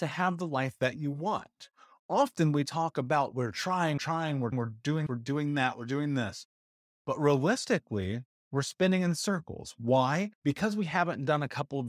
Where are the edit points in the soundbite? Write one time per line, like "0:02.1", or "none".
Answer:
0:04.0
0:04.5
0:05.1
0:10.3